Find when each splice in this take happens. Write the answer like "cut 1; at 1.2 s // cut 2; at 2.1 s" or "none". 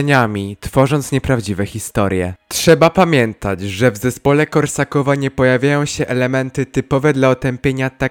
none